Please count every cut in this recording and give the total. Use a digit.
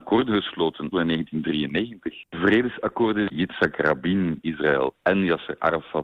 3